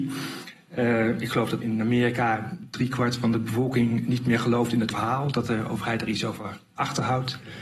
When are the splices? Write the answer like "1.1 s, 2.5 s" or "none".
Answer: 1.6 s, 4.9 s